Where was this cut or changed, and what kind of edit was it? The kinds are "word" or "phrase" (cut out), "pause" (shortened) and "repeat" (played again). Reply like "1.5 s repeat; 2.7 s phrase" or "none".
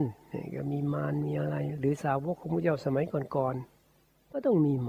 3.7 s pause